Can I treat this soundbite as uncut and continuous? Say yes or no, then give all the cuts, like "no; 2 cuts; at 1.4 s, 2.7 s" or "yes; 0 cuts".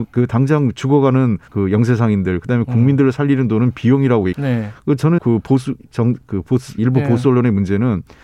no; 5 cuts; at 1.5 s, 4.3 s, 5.2 s, 5.8 s, 6.8 s